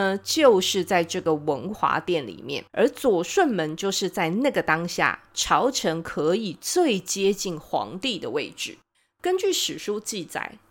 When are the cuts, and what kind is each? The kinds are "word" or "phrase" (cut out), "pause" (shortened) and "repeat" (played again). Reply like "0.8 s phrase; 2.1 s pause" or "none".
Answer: 2.7 s pause; 8.9 s pause